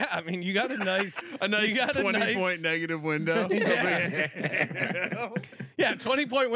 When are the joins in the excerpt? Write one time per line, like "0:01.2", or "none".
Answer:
0:01.2